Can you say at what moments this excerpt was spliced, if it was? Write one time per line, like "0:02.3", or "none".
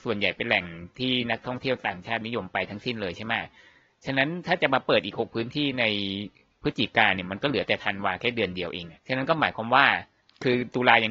0:09.0